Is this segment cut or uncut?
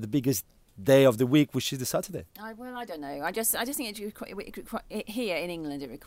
cut